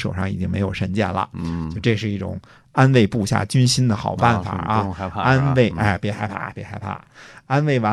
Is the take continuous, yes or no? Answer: yes